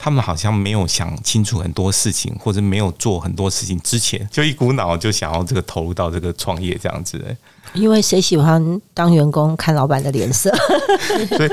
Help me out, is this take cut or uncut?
uncut